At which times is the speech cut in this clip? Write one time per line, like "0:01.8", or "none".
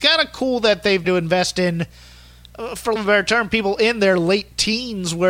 0:01.0
0:03.0